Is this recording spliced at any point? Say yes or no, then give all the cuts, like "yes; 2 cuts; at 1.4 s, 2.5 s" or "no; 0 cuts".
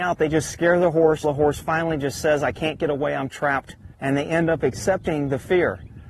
yes; 2 cuts; at 1.2 s, 3.9 s